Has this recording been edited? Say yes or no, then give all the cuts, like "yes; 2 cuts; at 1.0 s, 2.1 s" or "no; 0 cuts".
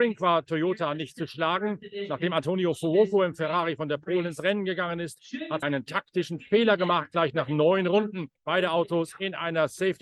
yes; 2 cuts; at 5.6 s, 8.3 s